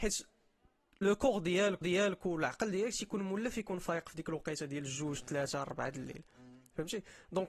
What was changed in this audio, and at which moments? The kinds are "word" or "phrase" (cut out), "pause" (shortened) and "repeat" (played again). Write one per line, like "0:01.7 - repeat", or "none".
0:01.8 - repeat